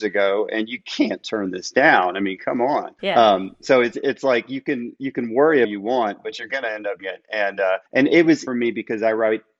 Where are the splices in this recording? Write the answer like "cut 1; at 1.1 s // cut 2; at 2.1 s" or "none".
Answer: cut 1; at 3.0 s // cut 2; at 5.6 s // cut 3; at 7.0 s // cut 4; at 7.9 s // cut 5; at 8.5 s

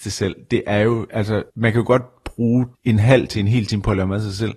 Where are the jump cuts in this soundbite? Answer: cut 1; at 1.5 s // cut 2; at 2.7 s

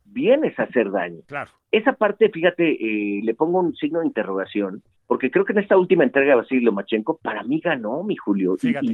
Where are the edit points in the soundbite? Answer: cut 1; at 5.0 s

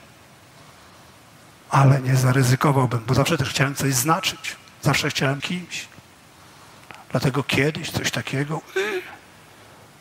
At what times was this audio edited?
cut 1; at 3.1 s // cut 2; at 5.4 s

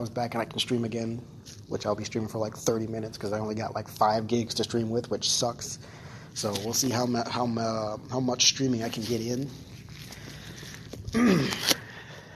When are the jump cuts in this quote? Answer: none

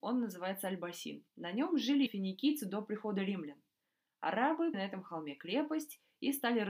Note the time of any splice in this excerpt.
cut 1; at 1.3 s // cut 2; at 2.1 s // cut 3; at 4.7 s

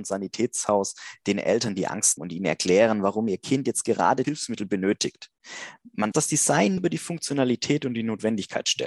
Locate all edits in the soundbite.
cut 1; at 2.2 s // cut 2; at 4.2 s // cut 3; at 6.1 s // cut 4; at 6.8 s

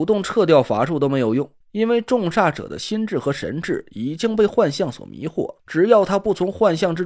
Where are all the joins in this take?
cut 1; at 1.6 s // cut 2; at 5.6 s

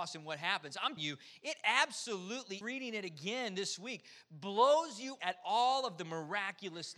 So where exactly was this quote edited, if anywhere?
cut 1; at 1.0 s // cut 2; at 2.6 s // cut 3; at 5.2 s

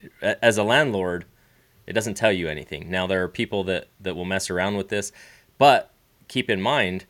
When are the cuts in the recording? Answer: none

